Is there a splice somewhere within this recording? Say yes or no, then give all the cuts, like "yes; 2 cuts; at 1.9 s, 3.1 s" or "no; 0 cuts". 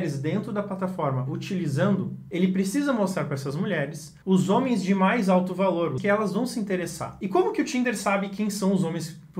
yes; 2 cuts; at 4.2 s, 6.0 s